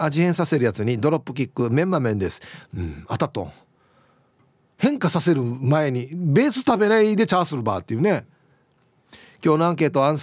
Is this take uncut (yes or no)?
yes